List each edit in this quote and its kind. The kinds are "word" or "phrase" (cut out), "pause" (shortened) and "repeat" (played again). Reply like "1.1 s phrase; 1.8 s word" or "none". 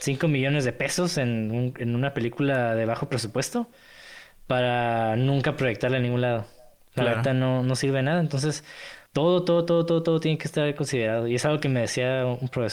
9.1 s pause